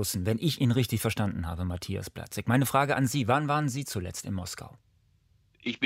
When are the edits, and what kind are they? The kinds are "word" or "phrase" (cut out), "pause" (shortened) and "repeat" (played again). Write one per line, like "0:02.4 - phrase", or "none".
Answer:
none